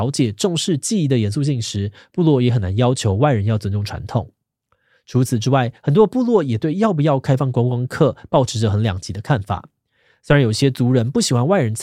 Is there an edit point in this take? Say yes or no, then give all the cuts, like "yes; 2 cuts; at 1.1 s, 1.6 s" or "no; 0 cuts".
no; 0 cuts